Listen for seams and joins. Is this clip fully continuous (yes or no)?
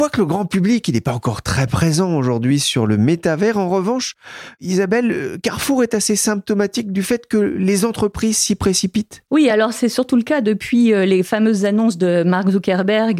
yes